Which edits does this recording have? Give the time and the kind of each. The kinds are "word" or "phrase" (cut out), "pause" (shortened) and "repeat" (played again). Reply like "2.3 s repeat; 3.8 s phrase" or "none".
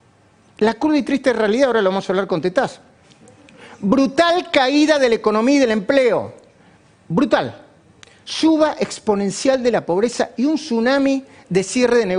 none